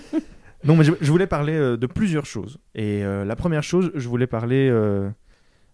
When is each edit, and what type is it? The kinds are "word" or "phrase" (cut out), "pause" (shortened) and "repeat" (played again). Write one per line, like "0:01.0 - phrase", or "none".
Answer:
0:02.7 - pause